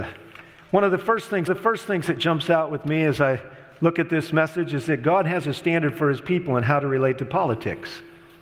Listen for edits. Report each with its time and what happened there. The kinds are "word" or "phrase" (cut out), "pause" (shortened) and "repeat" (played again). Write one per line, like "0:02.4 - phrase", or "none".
0:01.5 - repeat